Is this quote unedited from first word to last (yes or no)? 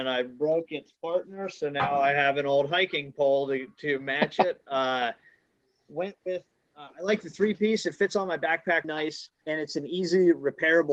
no